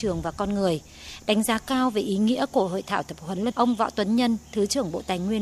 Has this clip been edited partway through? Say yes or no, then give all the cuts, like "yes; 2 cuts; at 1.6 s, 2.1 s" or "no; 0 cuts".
yes; 1 cut; at 3.5 s